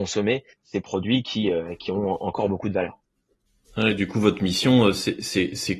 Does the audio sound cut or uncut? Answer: uncut